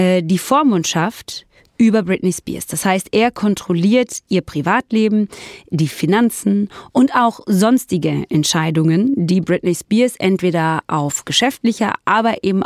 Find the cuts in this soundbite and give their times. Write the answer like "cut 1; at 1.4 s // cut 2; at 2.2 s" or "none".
none